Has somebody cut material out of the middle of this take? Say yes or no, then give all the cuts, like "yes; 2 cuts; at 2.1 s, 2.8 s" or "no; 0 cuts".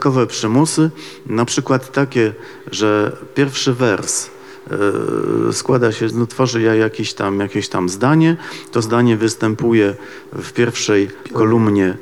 yes; 2 cuts; at 6.1 s, 8.8 s